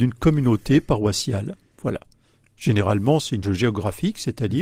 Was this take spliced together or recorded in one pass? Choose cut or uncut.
cut